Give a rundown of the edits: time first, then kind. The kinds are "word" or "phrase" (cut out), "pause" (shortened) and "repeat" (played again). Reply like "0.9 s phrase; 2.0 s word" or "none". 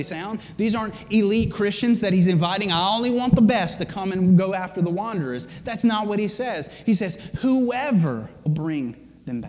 8.5 s word